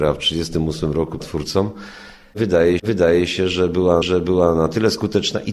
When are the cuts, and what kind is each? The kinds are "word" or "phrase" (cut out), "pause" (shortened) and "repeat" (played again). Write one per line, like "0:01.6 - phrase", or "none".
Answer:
0:01.2 - word
0:02.8 - repeat
0:04.0 - repeat